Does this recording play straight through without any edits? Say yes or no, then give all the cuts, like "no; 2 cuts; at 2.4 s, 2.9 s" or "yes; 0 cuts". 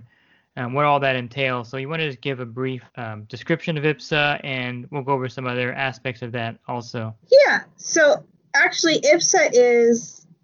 no; 2 cuts; at 2.9 s, 7.2 s